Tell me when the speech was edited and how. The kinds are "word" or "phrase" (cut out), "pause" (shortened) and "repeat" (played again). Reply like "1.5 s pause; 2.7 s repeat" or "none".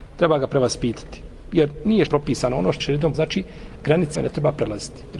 2.1 s word; 2.8 s word; 3.1 s word; 4.2 s word